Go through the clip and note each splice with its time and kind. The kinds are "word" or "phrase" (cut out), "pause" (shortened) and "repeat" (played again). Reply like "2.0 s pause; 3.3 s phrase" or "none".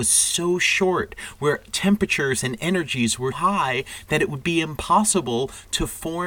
3.3 s word